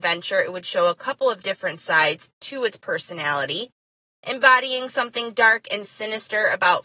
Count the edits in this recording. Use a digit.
0